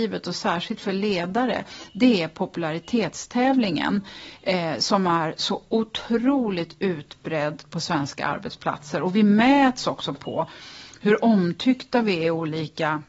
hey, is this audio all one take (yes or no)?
yes